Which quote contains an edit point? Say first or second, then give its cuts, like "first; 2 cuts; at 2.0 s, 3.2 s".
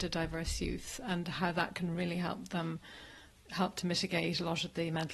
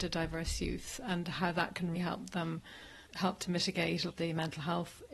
second; 3 cuts; at 1.9 s, 3.1 s, 4.1 s